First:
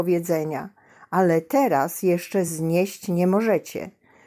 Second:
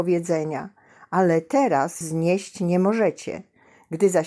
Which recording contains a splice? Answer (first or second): second